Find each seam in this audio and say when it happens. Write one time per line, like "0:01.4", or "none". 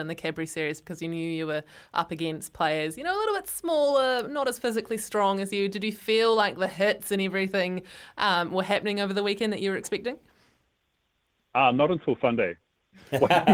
none